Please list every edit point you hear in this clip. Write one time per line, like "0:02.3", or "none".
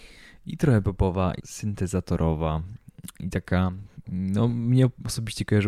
0:01.4